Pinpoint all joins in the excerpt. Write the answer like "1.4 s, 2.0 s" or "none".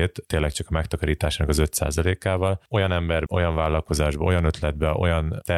3.3 s